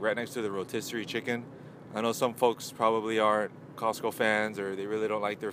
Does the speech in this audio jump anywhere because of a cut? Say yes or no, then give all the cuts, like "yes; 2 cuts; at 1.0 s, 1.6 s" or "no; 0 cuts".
no; 0 cuts